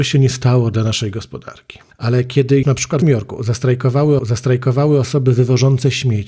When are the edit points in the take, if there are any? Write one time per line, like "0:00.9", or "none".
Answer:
0:01.9
0:02.6
0:03.0
0:04.2